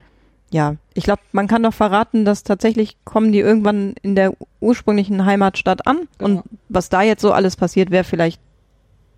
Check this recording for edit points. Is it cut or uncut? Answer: cut